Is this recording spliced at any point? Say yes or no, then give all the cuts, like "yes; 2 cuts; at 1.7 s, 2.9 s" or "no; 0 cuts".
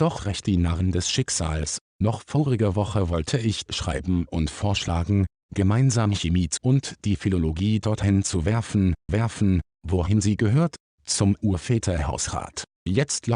yes; 3 cuts; at 3.7 s, 6.6 s, 9.1 s